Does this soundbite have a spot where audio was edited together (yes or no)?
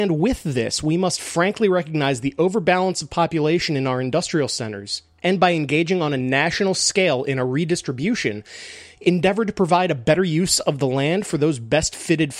no